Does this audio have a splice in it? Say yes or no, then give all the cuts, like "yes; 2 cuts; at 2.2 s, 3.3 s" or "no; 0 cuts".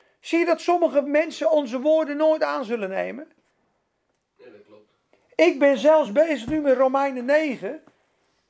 no; 0 cuts